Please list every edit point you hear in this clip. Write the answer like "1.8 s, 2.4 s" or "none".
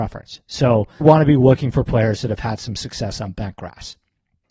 1.0 s